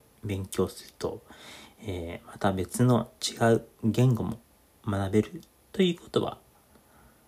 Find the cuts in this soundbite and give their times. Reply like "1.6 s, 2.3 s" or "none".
none